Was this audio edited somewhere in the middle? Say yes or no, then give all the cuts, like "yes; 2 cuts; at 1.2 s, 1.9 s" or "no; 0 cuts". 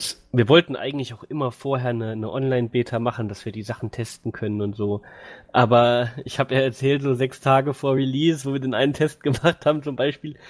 no; 0 cuts